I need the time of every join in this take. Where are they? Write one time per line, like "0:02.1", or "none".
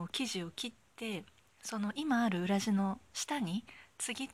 none